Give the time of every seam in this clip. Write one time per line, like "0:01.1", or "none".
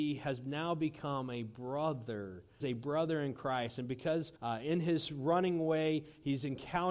0:02.6
0:04.4